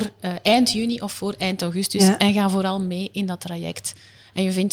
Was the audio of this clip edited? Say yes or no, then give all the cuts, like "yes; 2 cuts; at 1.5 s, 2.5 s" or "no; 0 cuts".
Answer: no; 0 cuts